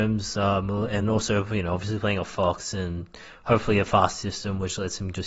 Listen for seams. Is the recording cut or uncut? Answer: cut